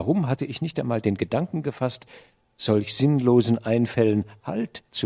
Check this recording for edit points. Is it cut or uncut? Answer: uncut